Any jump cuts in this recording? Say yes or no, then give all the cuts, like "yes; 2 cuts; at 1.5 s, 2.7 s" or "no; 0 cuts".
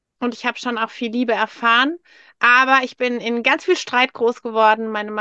no; 0 cuts